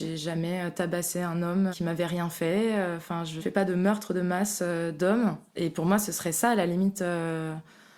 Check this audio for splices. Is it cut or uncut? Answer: cut